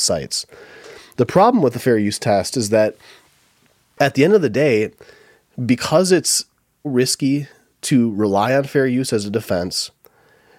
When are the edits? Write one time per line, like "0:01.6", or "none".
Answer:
0:06.8